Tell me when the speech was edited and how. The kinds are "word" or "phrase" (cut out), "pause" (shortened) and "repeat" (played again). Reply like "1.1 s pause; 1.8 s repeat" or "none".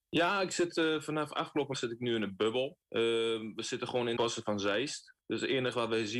1.7 s word; 2.8 s pause; 4.2 s word; 5.2 s pause